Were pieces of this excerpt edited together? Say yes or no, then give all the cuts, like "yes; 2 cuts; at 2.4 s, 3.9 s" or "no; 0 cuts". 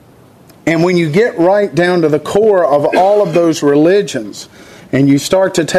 no; 0 cuts